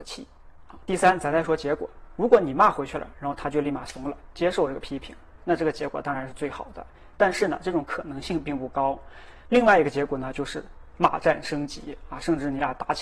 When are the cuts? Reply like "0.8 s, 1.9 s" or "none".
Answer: 5.4 s

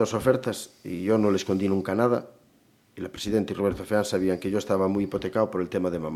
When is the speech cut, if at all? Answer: none

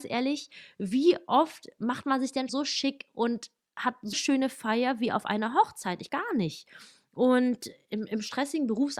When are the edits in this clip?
2.5 s, 4.1 s, 6.1 s

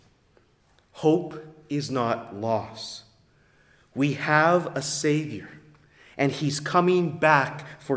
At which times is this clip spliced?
none

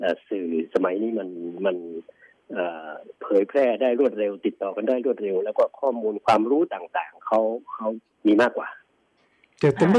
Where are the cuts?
3.1 s

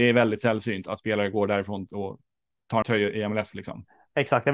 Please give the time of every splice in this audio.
2.8 s

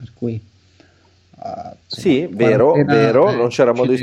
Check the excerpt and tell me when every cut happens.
1.8 s

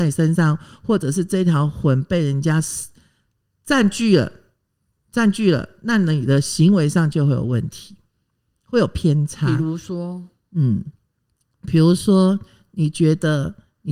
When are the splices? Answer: none

